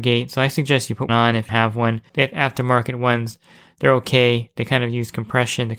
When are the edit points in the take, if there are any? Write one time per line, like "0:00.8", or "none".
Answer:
0:01.1
0:01.5
0:02.1